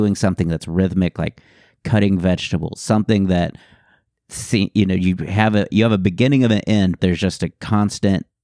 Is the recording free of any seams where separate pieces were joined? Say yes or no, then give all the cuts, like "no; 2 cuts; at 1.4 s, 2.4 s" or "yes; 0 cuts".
no; 1 cut; at 7.0 s